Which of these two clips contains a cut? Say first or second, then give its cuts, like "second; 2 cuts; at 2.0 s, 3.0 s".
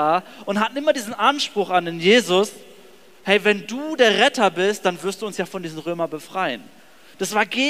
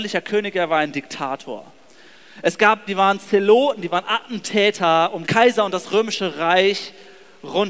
second; 2 cuts; at 2.9 s, 5.2 s